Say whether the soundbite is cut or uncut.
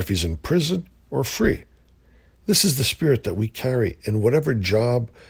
uncut